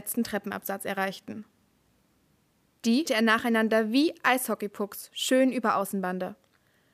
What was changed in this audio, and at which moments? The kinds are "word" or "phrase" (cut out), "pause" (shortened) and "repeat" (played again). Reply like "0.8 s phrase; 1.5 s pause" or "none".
3.1 s word